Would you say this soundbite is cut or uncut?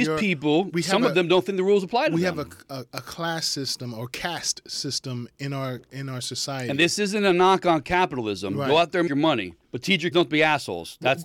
cut